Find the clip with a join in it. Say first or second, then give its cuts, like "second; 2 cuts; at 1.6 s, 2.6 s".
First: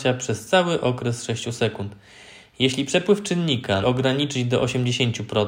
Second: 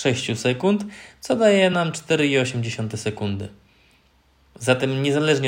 first; 1 cut; at 3.8 s